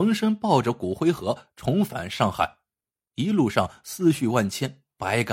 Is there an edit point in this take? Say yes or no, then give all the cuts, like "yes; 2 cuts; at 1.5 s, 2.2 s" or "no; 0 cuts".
no; 0 cuts